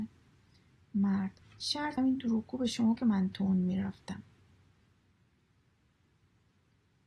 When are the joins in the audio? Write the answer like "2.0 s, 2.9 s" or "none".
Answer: 1.4 s, 2.0 s, 3.0 s